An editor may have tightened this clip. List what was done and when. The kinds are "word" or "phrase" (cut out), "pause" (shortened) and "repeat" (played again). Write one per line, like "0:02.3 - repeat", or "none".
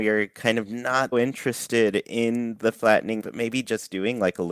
0:01.1 - word
0:03.2 - word